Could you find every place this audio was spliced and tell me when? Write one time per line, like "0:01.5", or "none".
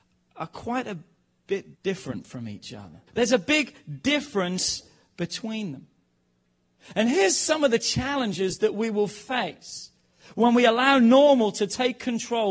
0:01.8
0:03.1